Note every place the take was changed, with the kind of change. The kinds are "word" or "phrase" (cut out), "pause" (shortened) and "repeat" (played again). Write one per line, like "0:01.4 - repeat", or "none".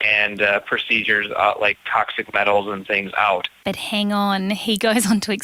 0:01.3 - phrase